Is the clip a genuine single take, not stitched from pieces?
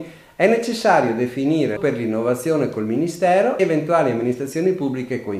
no; 2 cuts; at 1.8 s, 3.6 s

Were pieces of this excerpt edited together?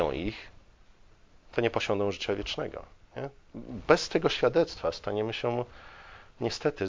no; 0 cuts

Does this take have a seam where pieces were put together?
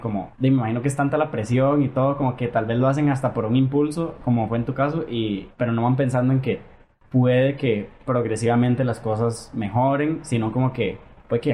no; 0 cuts

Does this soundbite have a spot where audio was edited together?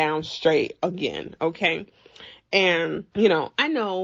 no; 0 cuts

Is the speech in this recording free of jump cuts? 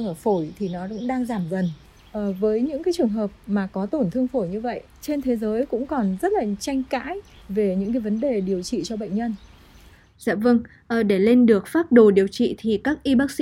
yes; 0 cuts

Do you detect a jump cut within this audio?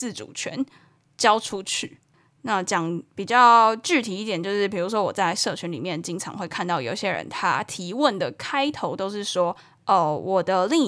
yes; 2 cuts; at 2.1 s, 9.6 s

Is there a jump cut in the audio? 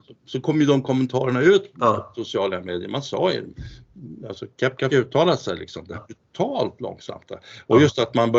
yes; 3 cuts; at 1.7 s, 4.9 s, 5.9 s

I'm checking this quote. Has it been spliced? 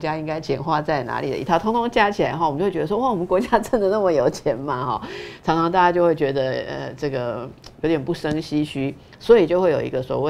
no; 0 cuts

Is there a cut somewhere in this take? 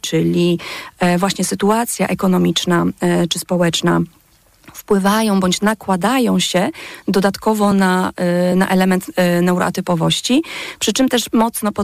no; 0 cuts

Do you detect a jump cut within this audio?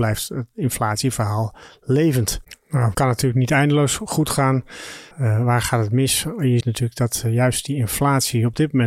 yes; 3 cuts; at 2.9 s, 5.1 s, 6.6 s

